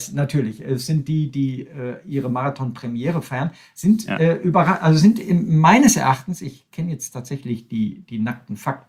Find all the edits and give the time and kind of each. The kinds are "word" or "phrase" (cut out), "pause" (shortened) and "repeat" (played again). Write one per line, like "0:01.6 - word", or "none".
none